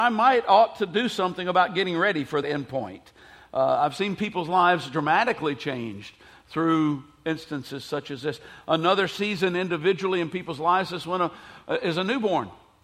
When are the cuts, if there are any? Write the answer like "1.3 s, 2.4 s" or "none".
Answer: 2.4 s